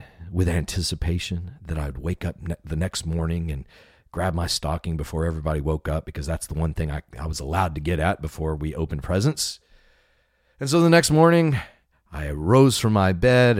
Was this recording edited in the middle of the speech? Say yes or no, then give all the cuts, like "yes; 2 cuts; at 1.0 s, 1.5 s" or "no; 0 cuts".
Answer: no; 0 cuts